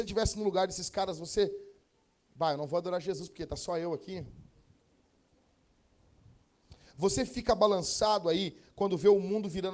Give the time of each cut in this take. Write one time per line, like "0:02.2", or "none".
none